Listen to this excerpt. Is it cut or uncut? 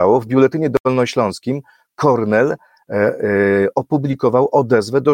uncut